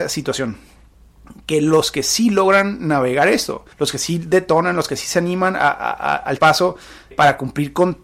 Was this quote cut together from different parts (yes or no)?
yes